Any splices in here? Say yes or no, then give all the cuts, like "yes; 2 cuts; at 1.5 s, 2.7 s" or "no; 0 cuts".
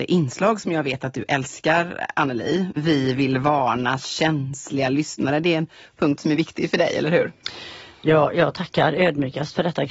no; 0 cuts